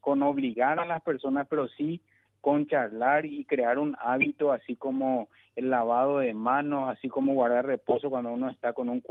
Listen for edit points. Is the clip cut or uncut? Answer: uncut